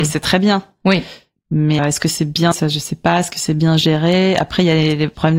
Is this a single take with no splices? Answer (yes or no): no